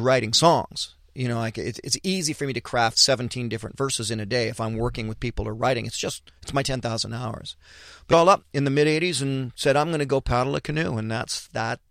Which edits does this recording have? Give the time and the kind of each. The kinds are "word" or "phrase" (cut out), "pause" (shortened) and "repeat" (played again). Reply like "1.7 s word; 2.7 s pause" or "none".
1.8 s word; 6.3 s pause; 8.1 s phrase